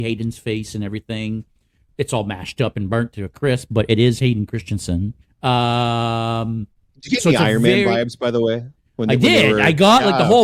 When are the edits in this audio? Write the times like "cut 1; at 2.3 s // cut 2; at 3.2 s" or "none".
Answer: cut 1; at 5.2 s